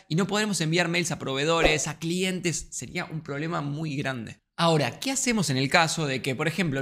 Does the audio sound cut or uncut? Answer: uncut